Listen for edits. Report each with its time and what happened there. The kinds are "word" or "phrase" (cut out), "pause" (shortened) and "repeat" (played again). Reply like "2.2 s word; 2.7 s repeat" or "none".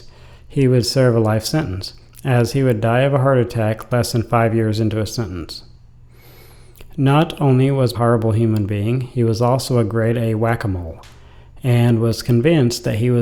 7.9 s phrase

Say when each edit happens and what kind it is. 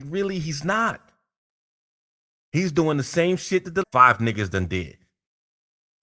3.8 s word

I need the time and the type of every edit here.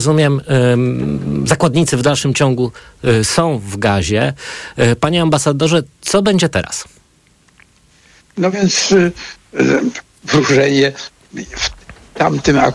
none

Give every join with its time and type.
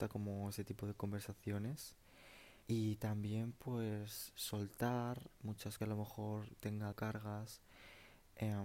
2.6 s pause; 5.8 s phrase; 6.9 s word

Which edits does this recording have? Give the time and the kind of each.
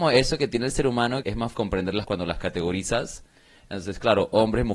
1.2 s word; 1.5 s word; 2.0 s word

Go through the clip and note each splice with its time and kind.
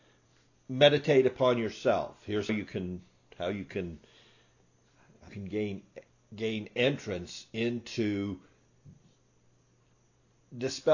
2.5 s word; 5.3 s word; 6.1 s pause

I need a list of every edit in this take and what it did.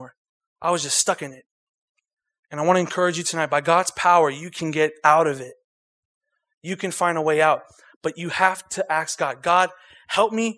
none

